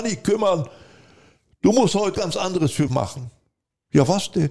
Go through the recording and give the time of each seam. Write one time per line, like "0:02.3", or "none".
0:02.1
0:02.9